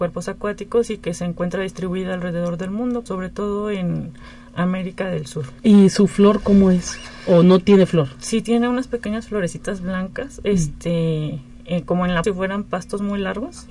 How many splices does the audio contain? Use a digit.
3